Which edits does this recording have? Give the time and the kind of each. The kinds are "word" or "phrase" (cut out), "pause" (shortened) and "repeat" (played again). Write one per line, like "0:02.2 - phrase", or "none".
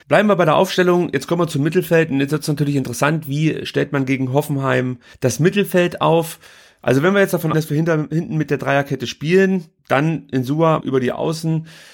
0:05.1 - pause
0:07.5 - word
0:09.8 - pause
0:10.8 - word

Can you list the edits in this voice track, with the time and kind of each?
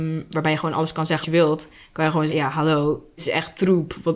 0:01.2 - word
0:02.3 - word
0:03.2 - word

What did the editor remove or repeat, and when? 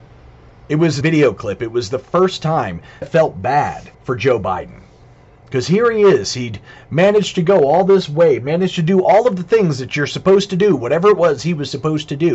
0:01.0 - word
0:03.0 - phrase
0:03.9 - pause
0:05.0 - pause

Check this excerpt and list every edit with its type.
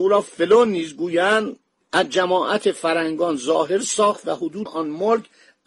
0:04.7 - word

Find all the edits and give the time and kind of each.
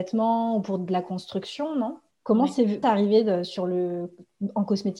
0:02.1 - pause
0:02.8 - phrase

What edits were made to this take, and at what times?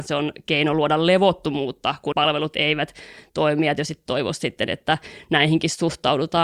0:02.1 - word

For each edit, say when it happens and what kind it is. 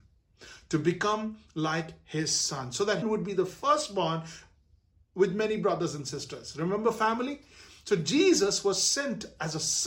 0:03.0 - phrase

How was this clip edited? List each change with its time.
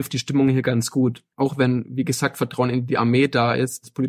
0:01.3 - pause

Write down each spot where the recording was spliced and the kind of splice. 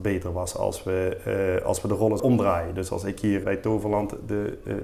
0:02.2 - word
0:03.4 - word

